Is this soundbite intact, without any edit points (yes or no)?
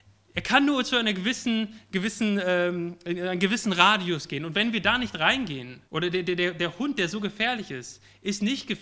no